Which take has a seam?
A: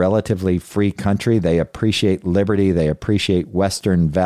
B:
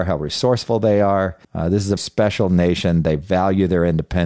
B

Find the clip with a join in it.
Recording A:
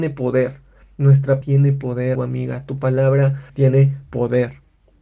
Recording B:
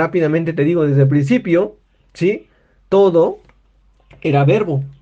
A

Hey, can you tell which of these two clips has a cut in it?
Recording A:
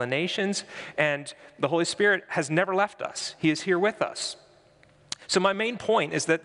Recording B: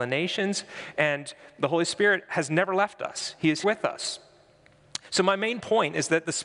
B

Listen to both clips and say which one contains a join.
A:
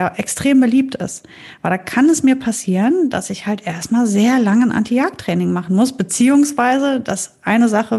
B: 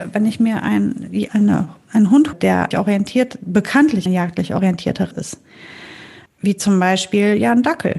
B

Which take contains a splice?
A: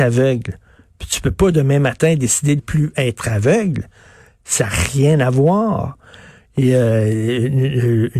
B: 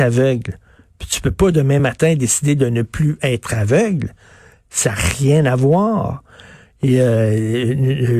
A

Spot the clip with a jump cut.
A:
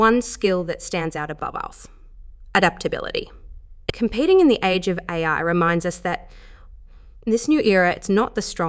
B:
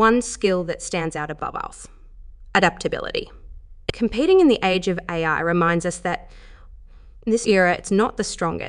B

